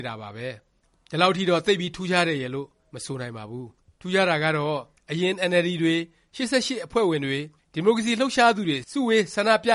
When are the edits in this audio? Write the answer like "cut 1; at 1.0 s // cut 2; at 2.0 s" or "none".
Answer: none